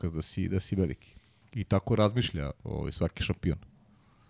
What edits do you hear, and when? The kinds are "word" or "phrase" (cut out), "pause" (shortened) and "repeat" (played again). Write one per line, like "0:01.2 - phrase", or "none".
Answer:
0:01.4 - pause

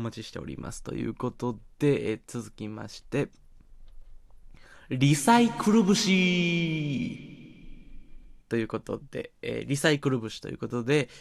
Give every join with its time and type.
0:08.4 - pause

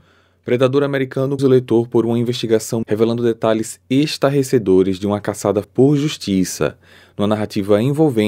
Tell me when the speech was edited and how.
0:01.4 - word
0:02.8 - word
0:05.6 - word

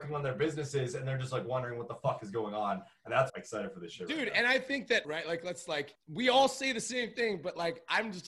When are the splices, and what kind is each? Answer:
0:03.3 - phrase
0:05.0 - phrase

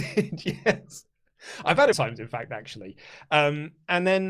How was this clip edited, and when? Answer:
0:01.9 - phrase

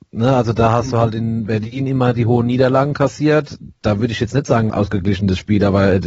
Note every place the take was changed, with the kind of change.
0:04.7 - word

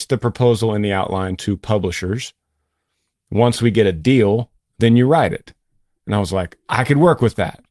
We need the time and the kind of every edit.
none

